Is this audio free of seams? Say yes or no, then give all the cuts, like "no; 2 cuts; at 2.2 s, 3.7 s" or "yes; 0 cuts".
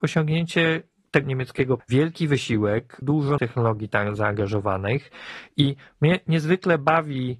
no; 4 cuts; at 1.2 s, 1.8 s, 3.0 s, 3.4 s